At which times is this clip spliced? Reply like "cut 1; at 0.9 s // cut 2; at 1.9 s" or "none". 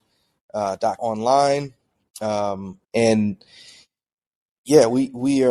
cut 1; at 1.0 s // cut 2; at 2.8 s